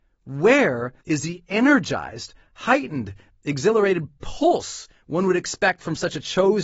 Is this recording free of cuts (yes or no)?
no